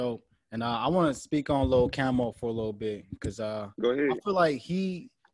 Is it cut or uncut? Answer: uncut